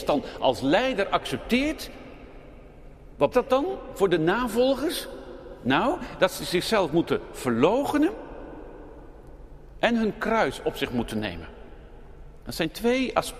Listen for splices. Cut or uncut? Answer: cut